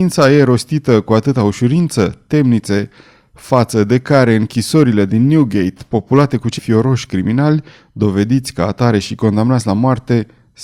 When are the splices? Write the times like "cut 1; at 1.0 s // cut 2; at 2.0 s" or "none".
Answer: cut 1; at 6.6 s